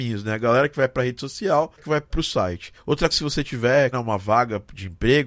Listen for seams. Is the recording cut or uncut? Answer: cut